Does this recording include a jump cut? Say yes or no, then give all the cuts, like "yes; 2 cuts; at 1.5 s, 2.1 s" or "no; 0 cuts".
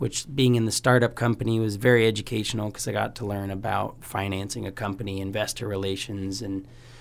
no; 0 cuts